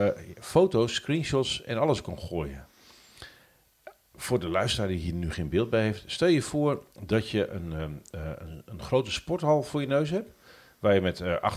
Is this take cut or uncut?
cut